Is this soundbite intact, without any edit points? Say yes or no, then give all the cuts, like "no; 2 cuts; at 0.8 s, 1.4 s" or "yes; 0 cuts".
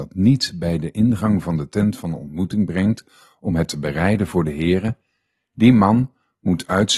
yes; 0 cuts